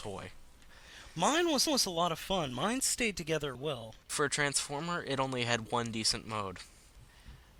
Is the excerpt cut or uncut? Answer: cut